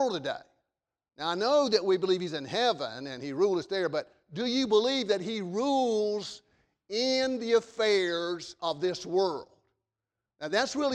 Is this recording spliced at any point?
no; 0 cuts

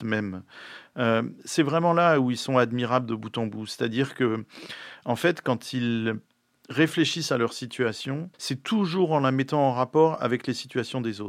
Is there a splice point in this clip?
yes; 1 cut; at 8.3 s

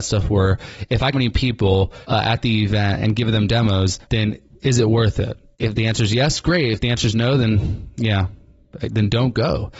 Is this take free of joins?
no; 3 cuts; at 1.1 s, 2.0 s, 4.0 s

